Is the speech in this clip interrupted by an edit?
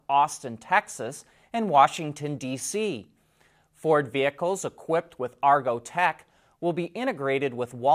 no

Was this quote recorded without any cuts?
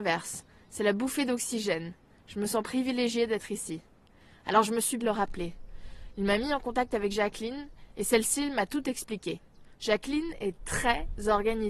no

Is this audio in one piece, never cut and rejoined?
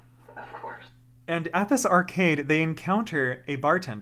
yes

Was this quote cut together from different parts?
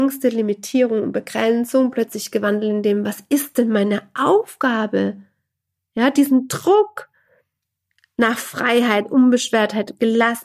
no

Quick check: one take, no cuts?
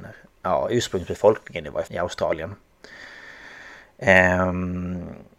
no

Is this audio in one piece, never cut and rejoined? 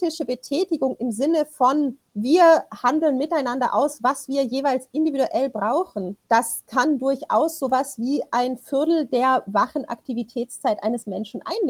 no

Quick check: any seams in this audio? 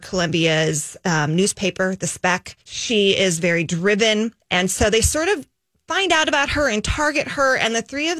yes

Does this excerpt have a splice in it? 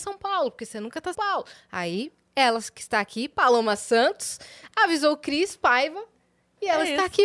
yes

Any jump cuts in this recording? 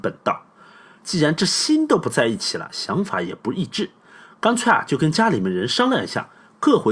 no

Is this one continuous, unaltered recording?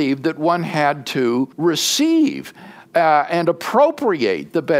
no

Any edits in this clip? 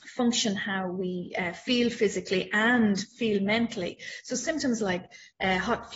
no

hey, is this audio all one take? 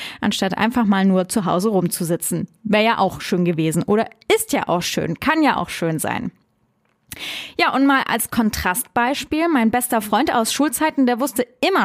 yes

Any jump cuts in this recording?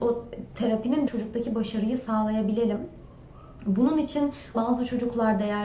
yes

